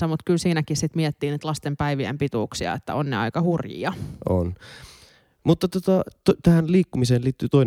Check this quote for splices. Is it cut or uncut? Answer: uncut